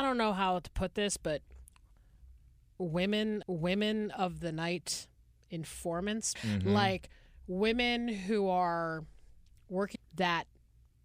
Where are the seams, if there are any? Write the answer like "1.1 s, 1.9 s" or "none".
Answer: 3.4 s, 6.4 s, 10.0 s